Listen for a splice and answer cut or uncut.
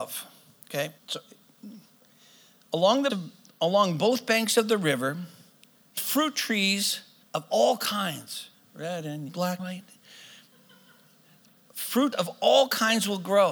cut